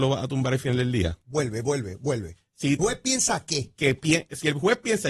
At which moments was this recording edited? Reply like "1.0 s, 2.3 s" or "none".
2.8 s